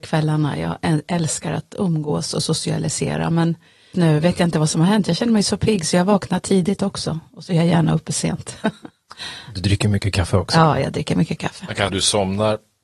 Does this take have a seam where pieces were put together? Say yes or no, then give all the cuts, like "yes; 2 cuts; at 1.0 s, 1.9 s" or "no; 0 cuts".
yes; 2 cuts; at 3.9 s, 11.9 s